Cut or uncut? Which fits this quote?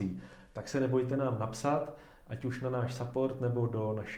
uncut